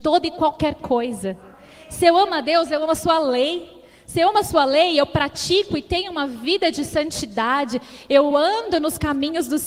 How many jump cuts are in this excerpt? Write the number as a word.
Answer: zero